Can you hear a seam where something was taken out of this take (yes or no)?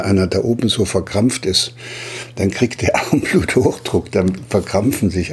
no